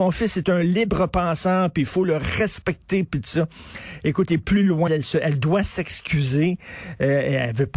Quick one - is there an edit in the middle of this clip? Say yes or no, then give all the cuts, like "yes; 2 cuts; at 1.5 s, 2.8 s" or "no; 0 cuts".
yes; 1 cut; at 4.9 s